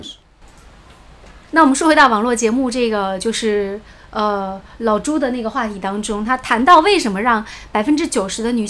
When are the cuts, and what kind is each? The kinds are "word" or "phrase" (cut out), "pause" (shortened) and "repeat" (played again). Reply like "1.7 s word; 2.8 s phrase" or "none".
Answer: 1.4 s pause

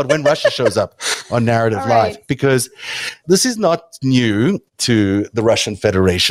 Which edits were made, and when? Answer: 4.7 s pause

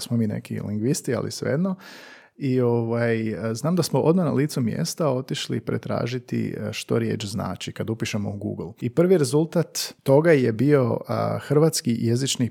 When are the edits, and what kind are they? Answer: 10.0 s pause

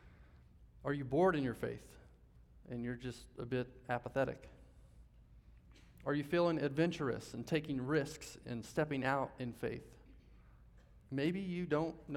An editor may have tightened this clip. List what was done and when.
11.0 s pause

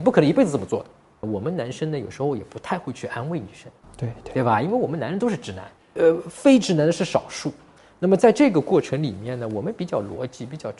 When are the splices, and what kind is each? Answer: none

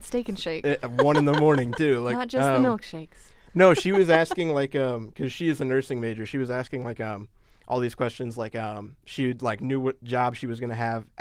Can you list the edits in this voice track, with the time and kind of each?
none

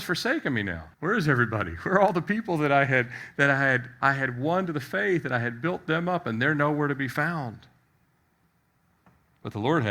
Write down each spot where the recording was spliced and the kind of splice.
0.9 s pause

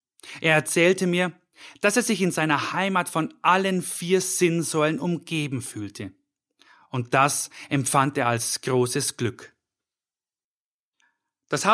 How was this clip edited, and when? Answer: none

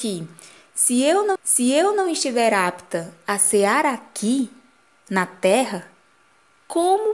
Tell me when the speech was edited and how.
1.4 s repeat

